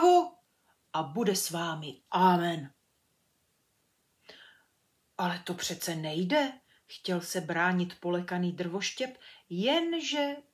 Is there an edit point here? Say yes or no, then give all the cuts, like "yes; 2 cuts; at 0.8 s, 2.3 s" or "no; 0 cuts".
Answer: no; 0 cuts